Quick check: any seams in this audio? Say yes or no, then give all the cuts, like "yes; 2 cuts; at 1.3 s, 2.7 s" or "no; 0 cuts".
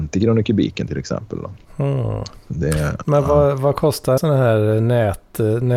yes; 2 cuts; at 1.6 s, 4.2 s